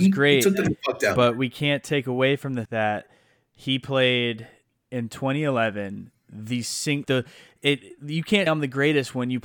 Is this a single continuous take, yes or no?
no